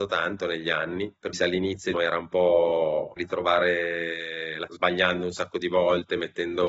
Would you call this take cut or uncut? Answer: cut